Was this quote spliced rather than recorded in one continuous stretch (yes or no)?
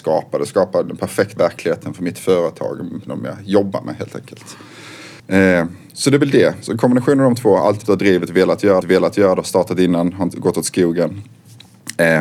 yes